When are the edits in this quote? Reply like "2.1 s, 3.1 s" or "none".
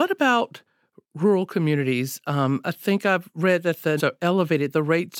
4.0 s